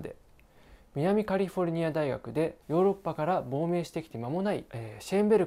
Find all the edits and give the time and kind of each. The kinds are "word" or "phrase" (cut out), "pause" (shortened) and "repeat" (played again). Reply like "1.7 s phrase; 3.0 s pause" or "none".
2.6 s pause